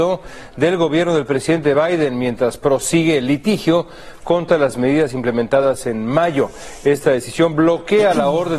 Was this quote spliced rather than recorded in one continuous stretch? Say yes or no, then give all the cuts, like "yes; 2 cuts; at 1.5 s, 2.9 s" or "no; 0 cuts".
no; 0 cuts